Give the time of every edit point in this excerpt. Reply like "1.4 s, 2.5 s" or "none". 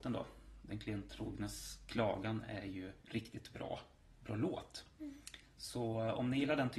3.0 s, 4.9 s